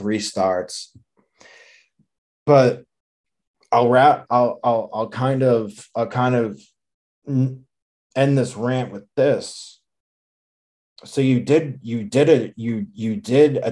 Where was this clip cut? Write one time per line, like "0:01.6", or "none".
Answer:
none